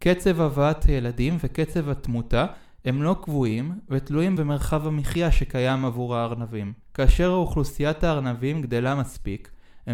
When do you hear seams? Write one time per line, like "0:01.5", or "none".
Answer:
0:04.4
0:06.8